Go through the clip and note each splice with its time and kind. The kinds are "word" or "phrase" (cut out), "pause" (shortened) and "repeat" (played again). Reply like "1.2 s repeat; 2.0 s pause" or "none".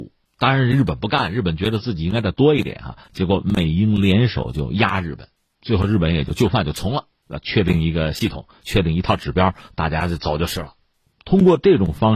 none